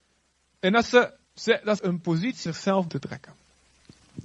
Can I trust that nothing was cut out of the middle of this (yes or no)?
no